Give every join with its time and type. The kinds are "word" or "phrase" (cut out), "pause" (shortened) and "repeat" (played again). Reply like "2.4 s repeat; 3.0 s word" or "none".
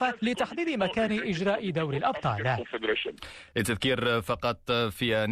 none